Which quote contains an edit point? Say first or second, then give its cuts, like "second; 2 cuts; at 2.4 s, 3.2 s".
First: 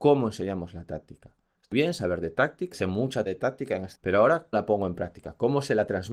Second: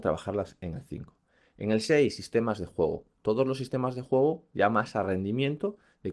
first; 5 cuts; at 1.7 s, 2.7 s, 3.3 s, 3.9 s, 4.5 s